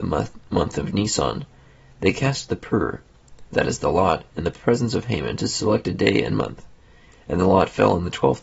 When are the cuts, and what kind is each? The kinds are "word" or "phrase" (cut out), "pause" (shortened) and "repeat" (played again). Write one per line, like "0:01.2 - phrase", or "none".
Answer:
none